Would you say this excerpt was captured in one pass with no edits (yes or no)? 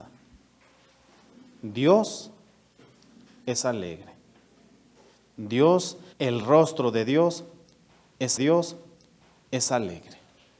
no